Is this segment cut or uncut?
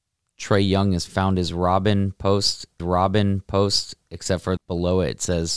cut